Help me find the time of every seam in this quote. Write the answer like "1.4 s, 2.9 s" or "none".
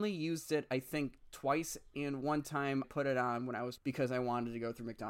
2.8 s, 3.8 s